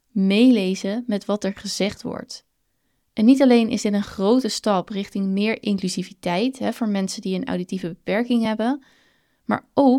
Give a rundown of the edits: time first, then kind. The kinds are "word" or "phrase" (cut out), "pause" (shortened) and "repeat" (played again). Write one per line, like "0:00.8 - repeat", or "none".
none